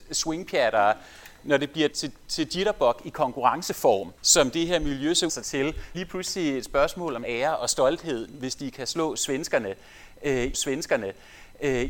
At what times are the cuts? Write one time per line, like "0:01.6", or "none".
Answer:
0:01.9
0:04.2
0:05.3
0:05.9
0:07.2
0:10.5